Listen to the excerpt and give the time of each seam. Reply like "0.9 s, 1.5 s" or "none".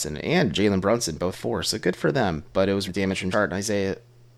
1.3 s, 2.9 s, 3.3 s